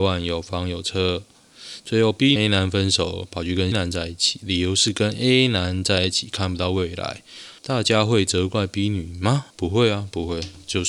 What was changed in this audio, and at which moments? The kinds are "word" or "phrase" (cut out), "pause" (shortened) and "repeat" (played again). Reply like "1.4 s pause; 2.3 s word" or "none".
2.4 s phrase; 3.7 s word; 7.6 s pause; 9.5 s pause